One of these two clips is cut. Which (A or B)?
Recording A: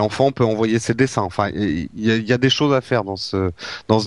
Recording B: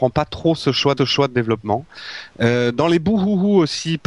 B